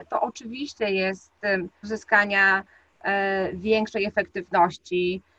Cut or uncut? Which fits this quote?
cut